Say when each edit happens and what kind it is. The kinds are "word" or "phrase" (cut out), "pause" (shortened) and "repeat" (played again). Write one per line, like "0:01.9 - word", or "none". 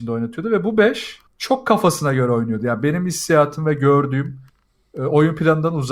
0:01.3 - pause